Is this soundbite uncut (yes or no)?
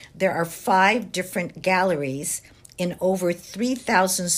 yes